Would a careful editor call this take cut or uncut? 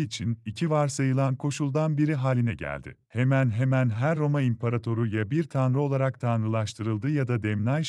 uncut